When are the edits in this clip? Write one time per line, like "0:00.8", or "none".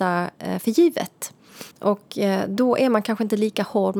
0:01.7